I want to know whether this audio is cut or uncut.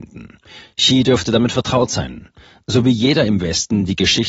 uncut